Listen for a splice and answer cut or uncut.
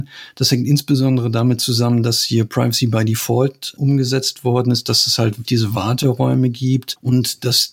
cut